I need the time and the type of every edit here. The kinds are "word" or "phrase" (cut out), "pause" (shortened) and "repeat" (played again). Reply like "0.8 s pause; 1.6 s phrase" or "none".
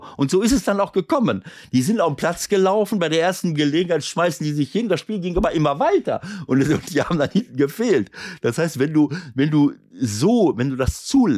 none